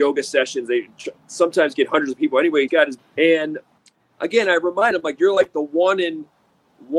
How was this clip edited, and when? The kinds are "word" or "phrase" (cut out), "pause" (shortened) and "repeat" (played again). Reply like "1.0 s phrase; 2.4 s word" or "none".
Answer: 2.7 s phrase; 3.0 s phrase; 3.8 s pause; 5.2 s word